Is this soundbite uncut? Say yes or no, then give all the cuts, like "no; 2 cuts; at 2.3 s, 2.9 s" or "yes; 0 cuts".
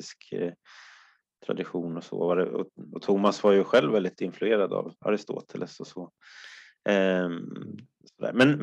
no; 1 cut; at 5.0 s